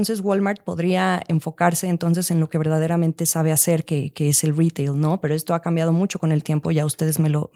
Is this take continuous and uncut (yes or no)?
yes